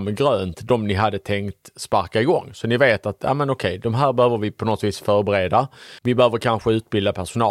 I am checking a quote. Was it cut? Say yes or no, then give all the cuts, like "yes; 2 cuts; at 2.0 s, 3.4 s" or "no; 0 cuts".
yes; 1 cut; at 6.0 s